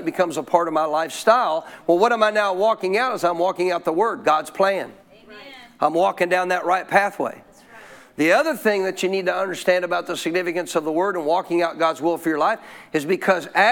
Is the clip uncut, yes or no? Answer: no